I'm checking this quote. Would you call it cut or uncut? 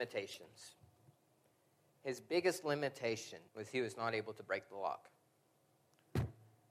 cut